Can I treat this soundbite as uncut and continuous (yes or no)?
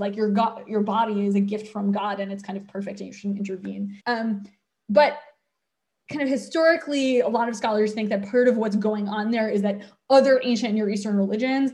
no